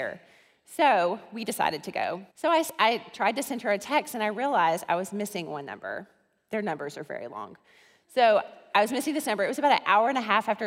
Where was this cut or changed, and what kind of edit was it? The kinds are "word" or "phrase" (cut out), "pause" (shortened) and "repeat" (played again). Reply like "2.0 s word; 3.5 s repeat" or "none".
2.3 s pause